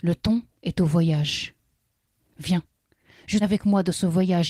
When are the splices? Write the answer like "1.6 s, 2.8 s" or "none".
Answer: 3.4 s